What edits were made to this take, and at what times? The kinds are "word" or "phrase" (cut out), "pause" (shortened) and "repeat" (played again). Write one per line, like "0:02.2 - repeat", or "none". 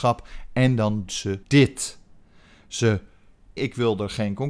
0:01.1 - word
0:01.4 - pause
0:03.6 - phrase